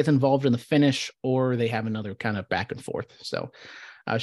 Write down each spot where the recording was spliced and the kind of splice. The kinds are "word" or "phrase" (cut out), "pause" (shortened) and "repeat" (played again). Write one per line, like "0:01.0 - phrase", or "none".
0:02.5 - word